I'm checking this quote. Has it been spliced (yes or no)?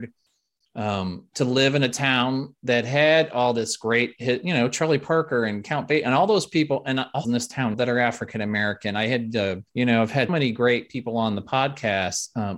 yes